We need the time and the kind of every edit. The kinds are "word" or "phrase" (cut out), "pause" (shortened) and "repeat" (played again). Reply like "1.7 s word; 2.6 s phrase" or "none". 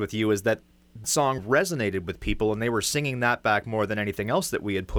1.0 s word; 1.4 s word